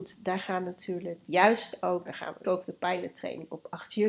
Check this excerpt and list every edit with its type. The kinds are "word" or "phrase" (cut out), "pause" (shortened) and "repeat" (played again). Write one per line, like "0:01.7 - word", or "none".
0:01.3 - word
0:02.1 - word
0:02.4 - word